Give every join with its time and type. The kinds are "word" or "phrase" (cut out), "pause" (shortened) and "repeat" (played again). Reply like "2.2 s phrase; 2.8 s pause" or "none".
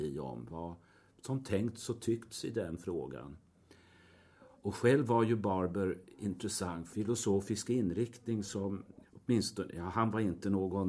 4.6 s pause; 6.9 s phrase; 9.0 s word